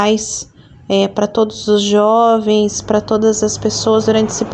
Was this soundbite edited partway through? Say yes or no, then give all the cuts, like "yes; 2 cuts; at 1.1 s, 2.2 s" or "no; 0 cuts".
no; 0 cuts